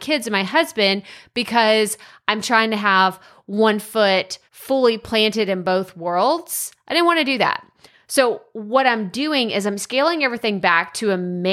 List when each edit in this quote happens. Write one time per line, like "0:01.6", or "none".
0:04.5